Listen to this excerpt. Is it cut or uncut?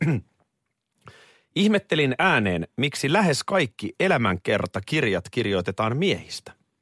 uncut